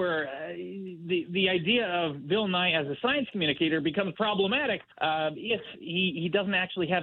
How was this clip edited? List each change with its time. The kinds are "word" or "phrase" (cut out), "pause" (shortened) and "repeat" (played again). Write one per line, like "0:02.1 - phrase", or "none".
0:04.9 - pause